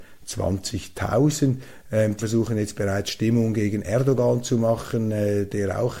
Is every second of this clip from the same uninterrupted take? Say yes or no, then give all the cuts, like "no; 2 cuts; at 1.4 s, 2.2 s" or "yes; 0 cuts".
no; 1 cut; at 2.2 s